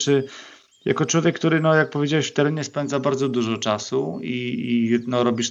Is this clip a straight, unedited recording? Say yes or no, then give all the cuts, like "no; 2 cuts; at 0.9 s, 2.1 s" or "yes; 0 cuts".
yes; 0 cuts